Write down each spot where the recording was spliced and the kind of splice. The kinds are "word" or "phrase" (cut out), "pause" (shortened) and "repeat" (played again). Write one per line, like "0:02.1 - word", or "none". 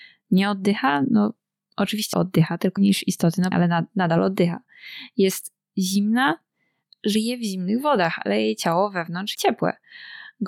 0:02.1 - word
0:02.8 - word
0:03.5 - word
0:09.3 - word